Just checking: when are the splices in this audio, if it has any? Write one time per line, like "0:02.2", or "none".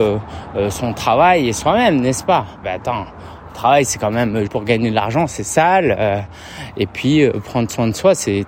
0:02.6
0:04.5